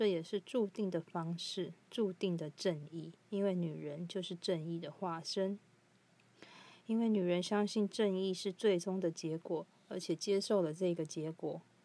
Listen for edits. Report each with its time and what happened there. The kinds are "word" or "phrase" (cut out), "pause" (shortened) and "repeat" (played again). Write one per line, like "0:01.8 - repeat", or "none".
0:01.8 - pause
0:03.2 - pause